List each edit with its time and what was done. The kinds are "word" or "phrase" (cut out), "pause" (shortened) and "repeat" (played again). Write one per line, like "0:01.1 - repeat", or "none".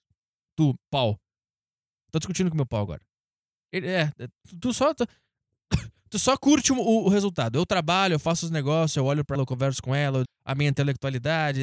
0:09.3 - word
0:10.2 - word